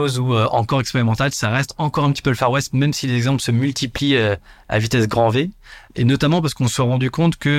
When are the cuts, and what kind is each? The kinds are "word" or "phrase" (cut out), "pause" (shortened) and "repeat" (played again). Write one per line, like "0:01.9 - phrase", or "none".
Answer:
none